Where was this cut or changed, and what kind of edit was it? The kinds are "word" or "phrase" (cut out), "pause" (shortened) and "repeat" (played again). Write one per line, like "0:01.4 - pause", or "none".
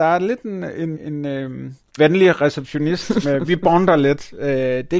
0:00.9 - word
0:02.0 - word
0:03.2 - word

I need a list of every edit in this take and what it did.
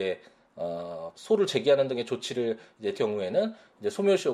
0:01.1 - phrase
0:02.9 - word

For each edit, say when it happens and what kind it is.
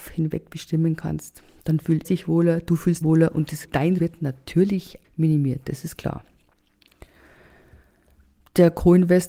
0:02.0 - word
0:03.0 - word
0:03.6 - word
0:04.0 - word
0:05.0 - word
0:06.0 - word

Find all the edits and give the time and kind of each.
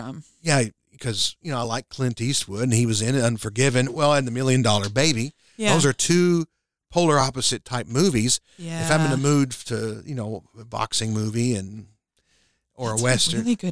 none

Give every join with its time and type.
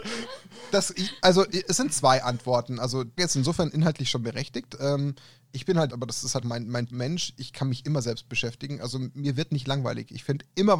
0:03.2 - word
0:05.9 - word
0:06.4 - word
0:06.9 - word

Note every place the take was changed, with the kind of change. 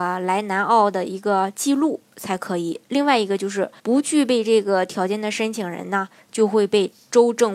0:03.8 - pause

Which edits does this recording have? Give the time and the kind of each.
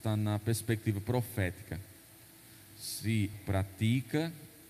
0:03.3 - word

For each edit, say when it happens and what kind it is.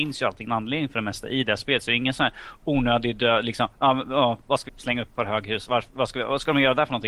0:04.7 - phrase

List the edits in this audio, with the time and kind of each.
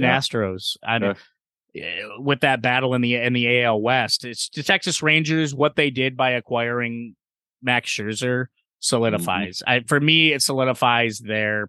0:01.0 - word

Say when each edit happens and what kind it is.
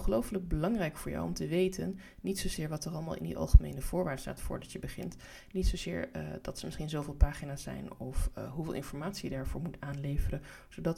none

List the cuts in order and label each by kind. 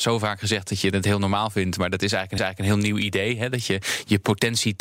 0:02.4 - repeat

